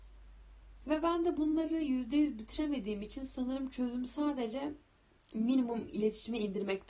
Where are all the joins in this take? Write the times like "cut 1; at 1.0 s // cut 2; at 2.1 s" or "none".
none